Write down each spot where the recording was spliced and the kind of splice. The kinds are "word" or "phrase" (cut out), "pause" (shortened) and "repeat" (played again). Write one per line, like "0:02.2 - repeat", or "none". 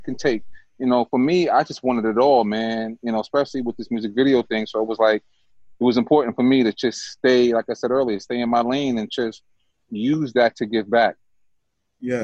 none

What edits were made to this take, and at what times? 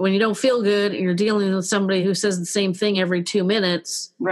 none

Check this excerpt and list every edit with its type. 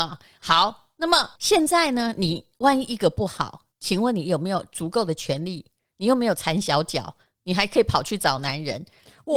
0:01.4 - pause
0:03.7 - pause

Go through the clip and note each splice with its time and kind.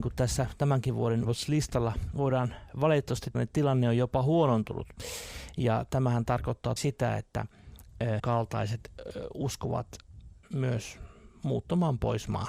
0:01.2 - word
0:03.3 - word
0:06.8 - word
0:08.2 - word
0:10.4 - word

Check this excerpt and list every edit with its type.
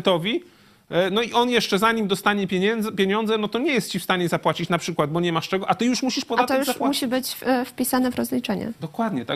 none

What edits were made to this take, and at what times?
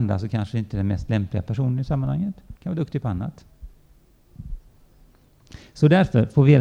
0:02.6 - pause

